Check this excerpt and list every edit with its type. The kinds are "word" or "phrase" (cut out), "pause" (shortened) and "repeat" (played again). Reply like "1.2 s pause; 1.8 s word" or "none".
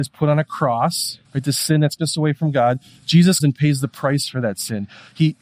1.2 s pause; 2.0 s word; 3.4 s word

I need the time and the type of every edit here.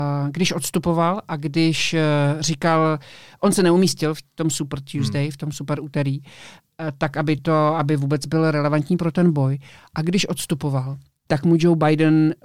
none

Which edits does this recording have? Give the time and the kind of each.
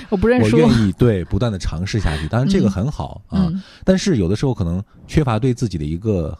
none

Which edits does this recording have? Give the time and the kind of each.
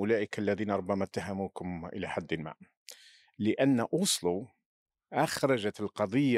none

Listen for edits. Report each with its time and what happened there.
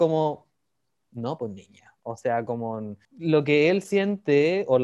3.0 s pause

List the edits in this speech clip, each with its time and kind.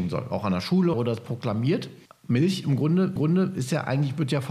0.9 s phrase; 2.1 s pause; 3.2 s repeat

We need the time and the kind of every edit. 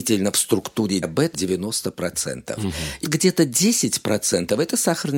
1.0 s word; 1.3 s word; 3.0 s word

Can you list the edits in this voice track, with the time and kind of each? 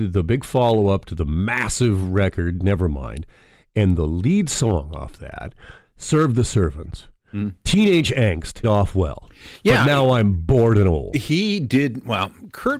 8.6 s phrase

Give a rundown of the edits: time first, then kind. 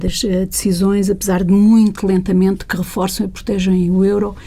none

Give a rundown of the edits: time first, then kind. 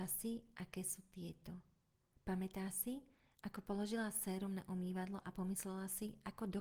none

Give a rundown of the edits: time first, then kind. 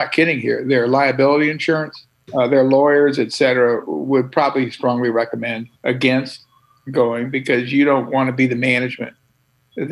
2.1 s pause; 5.8 s pause

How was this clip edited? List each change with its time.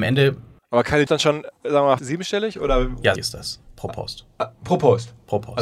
1.1 s phrase; 2.0 s phrase; 3.2 s word

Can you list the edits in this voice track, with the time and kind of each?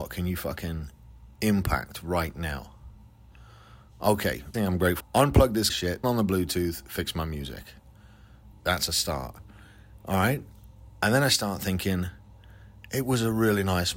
4.5 s word; 5.0 s word; 5.7 s word; 6.0 s word; 8.5 s word

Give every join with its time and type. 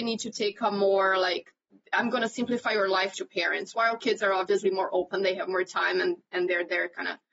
3.1 s phrase

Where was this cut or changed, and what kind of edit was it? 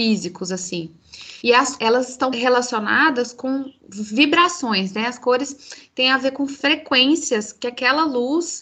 1.4 s pause; 1.8 s word; 2.3 s word; 3.8 s pause; 6.6 s word

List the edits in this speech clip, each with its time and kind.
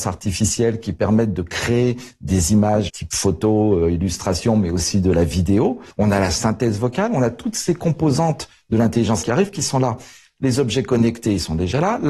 2.9 s word; 5.9 s pause; 9.2 s word

